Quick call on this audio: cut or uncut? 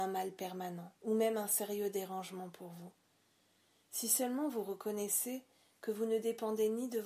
cut